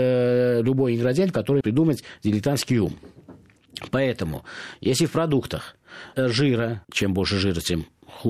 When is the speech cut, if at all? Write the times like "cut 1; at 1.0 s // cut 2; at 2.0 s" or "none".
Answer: cut 1; at 1.6 s // cut 2; at 6.1 s // cut 3; at 6.8 s